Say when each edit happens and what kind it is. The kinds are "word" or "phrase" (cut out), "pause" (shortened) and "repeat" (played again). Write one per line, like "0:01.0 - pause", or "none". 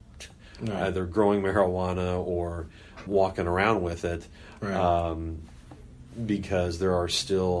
0:03.1 - word